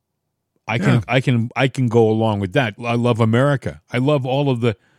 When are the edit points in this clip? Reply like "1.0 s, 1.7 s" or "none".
2.8 s